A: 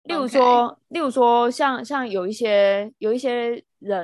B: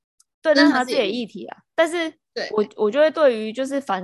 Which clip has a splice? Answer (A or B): B